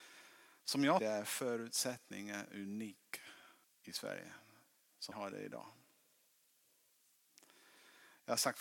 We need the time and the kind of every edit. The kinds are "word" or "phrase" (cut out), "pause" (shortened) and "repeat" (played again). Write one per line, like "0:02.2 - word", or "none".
0:01.0 - word
0:03.6 - pause
0:05.1 - word